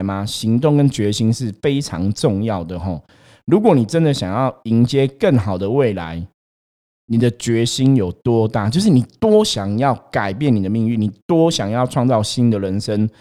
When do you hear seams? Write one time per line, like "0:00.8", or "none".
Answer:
none